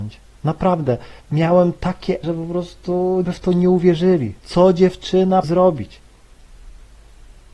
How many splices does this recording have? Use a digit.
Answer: 5